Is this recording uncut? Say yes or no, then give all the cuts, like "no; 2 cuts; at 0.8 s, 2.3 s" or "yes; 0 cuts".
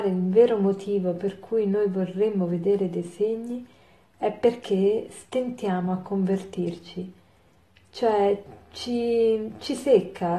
yes; 0 cuts